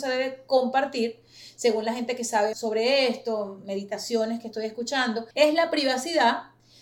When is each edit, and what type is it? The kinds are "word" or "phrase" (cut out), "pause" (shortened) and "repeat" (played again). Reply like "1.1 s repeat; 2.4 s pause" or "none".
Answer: 2.5 s word; 5.3 s pause